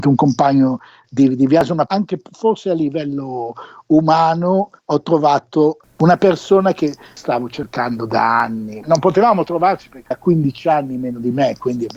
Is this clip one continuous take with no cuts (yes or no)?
no